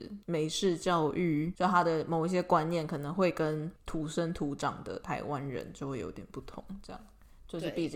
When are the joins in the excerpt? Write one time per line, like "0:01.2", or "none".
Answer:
0:03.8